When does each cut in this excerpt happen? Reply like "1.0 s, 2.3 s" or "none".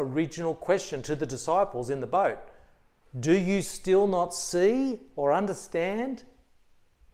none